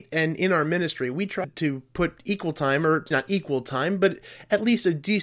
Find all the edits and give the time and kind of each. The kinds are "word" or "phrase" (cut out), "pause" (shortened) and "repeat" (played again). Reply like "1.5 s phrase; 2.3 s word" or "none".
1.4 s word; 3.1 s word